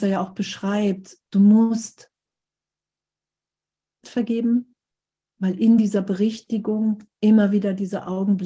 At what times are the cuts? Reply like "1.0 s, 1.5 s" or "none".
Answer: 1.3 s, 4.0 s